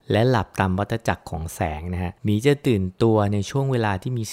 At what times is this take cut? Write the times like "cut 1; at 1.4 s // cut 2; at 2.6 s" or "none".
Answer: cut 1; at 2.2 s